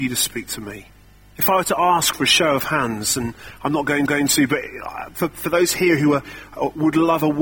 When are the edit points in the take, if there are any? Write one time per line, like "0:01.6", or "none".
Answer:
0:01.0
0:04.1